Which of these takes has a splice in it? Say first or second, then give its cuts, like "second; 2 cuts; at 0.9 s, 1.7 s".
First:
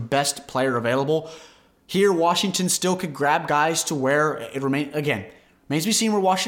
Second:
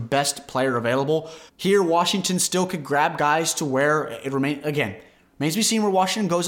second; 1 cut; at 1.5 s